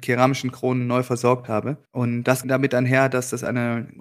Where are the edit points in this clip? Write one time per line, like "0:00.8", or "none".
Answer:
0:01.8
0:02.4

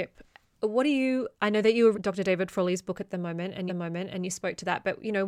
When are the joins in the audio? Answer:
0:01.3
0:01.9
0:03.7

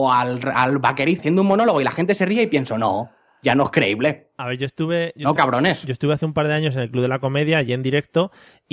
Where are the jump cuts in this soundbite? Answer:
0:01.2
0:05.4

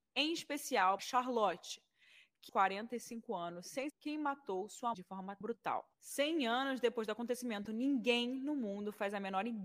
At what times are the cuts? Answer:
0:01.0
0:02.5
0:03.9
0:04.9
0:05.4
0:05.9

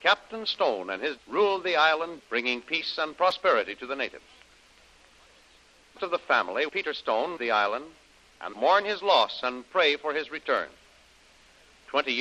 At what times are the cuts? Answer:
0:01.2
0:02.2
0:06.0
0:06.7
0:07.4
0:08.5

